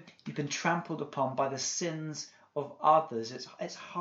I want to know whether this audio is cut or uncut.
uncut